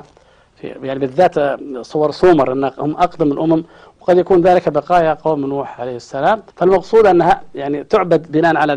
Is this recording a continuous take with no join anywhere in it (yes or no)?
no